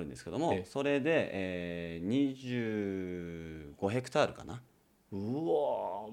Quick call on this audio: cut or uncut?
uncut